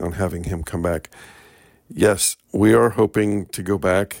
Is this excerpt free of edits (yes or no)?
yes